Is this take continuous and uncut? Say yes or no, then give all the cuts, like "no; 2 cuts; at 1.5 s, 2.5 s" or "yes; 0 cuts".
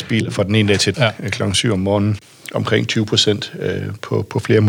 no; 1 cut; at 0.9 s